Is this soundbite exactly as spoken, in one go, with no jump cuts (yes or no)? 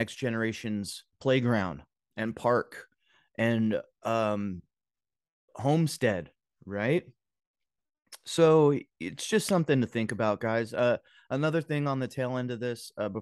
yes